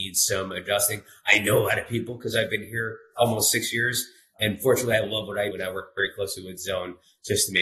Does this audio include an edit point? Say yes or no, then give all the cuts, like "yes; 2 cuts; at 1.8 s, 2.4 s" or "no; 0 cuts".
yes; 1 cut; at 5.5 s